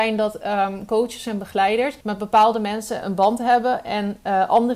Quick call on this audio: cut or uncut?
cut